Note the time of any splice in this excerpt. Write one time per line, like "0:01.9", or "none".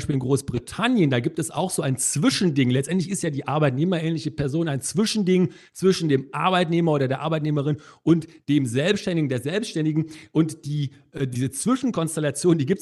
none